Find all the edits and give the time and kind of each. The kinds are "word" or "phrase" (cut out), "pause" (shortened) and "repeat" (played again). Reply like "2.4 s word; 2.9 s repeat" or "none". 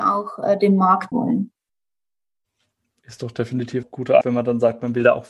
1.1 s word; 3.8 s word; 4.2 s word